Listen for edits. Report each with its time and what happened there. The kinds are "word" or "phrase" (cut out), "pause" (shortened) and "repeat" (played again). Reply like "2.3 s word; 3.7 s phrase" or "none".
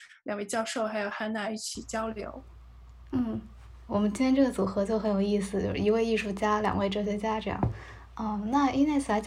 3.9 s word